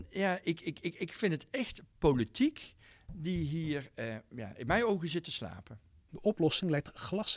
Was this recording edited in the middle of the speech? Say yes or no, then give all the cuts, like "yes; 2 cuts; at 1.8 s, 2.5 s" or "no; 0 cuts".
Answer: no; 0 cuts